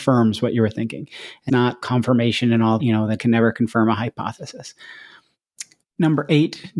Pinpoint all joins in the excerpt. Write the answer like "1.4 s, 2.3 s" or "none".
1.5 s, 1.8 s, 2.8 s, 3.2 s